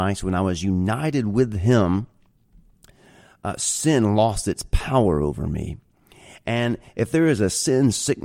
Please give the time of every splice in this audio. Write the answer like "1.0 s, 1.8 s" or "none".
none